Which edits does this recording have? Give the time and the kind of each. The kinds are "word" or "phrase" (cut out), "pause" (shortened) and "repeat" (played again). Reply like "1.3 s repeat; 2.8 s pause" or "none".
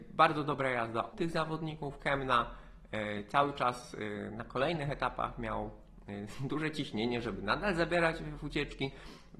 1.1 s word